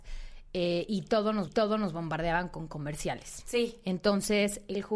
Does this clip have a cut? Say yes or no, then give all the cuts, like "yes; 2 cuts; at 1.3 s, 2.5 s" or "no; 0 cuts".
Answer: yes; 1 cut; at 1.5 s